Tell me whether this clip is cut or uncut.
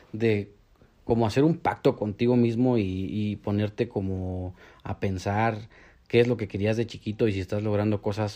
uncut